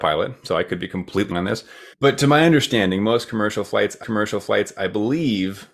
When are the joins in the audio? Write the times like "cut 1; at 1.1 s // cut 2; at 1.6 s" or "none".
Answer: cut 1; at 1.3 s // cut 2; at 1.9 s // cut 3; at 4.0 s